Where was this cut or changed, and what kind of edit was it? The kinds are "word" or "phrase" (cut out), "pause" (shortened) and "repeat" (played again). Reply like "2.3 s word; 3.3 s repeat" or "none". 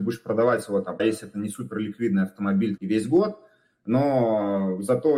1.0 s word; 2.8 s word